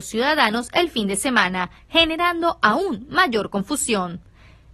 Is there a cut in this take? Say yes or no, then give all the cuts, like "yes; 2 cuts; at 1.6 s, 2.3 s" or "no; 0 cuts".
no; 0 cuts